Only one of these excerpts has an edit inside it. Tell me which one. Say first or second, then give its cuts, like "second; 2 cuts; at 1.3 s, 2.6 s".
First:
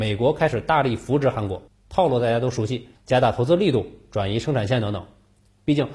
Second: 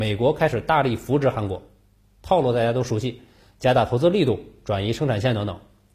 first; 2 cuts; at 1.7 s, 2.9 s